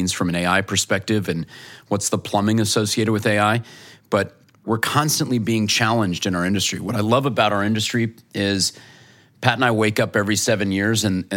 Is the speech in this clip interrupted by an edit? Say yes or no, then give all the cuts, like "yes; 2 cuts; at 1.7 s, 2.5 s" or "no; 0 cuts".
no; 0 cuts